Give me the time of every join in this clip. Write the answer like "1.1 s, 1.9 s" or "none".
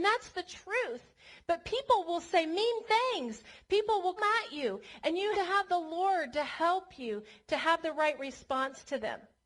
4.2 s, 5.3 s